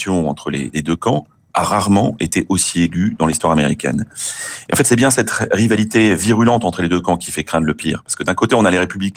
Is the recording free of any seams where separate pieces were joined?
yes; 0 cuts

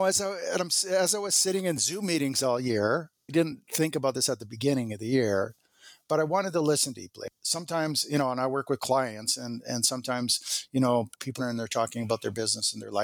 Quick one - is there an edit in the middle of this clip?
yes; 2 cuts; at 3.3 s, 11.4 s

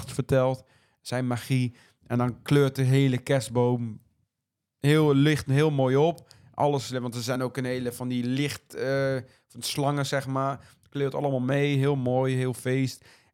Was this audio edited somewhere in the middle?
no; 0 cuts

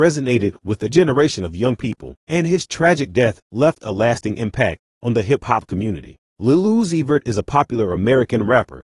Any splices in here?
yes; 2 cuts; at 2.2 s, 6.3 s

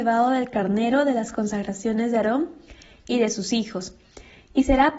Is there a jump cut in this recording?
no; 0 cuts

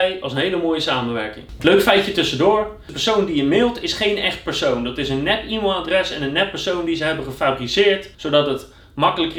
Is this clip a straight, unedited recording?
no; 1 cut; at 8.1 s

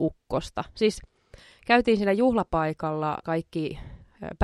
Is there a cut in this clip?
yes; 1 cut; at 3.2 s

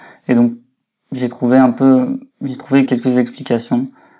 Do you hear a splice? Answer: yes; 2 cuts; at 2.3 s, 2.9 s

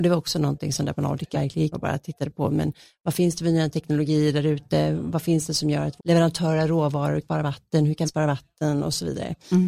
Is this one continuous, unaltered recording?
no; 5 cuts; at 1.3 s, 1.7 s, 6.0 s, 7.2 s, 8.1 s

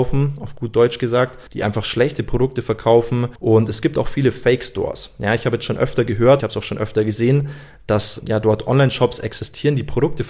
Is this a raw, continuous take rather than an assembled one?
no; 4 cuts; at 1.5 s, 3.4 s, 6.4 s, 8.2 s

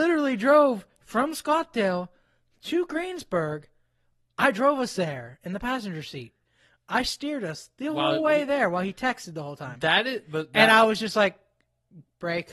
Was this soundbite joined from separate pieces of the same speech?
no; 0 cuts

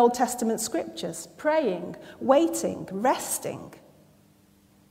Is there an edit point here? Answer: no; 0 cuts

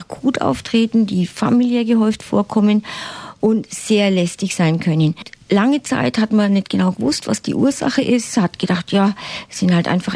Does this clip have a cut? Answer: no; 0 cuts

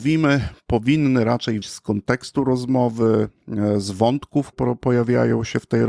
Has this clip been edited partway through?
yes; 2 cuts; at 1.6 s, 4.5 s

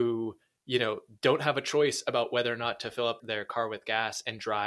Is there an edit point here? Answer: yes; 1 cut; at 3.2 s

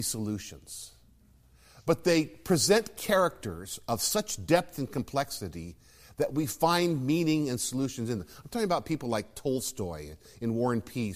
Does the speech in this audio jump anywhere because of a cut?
no; 0 cuts

